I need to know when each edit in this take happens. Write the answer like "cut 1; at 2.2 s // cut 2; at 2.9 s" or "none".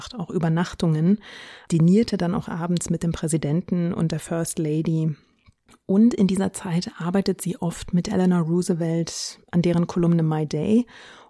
none